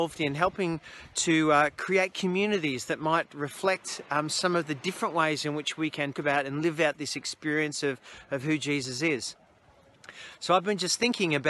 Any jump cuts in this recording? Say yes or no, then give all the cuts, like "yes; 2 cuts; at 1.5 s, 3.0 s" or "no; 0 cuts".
yes; 1 cut; at 6.1 s